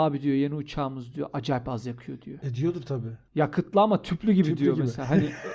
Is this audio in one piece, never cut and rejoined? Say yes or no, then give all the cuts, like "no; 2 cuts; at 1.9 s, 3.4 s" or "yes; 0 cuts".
yes; 0 cuts